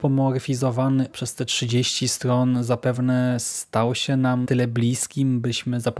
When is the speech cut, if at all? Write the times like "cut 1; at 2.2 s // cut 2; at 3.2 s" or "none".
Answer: cut 1; at 1.1 s // cut 2; at 4.4 s